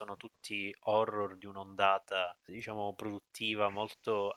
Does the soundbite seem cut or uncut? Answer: cut